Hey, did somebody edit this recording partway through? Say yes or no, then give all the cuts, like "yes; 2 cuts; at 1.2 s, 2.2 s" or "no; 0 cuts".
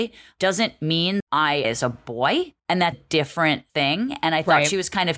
yes; 5 cuts; at 1.2 s, 1.6 s, 2.6 s, 2.9 s, 3.7 s